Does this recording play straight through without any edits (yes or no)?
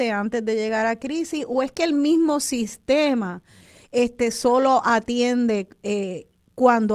yes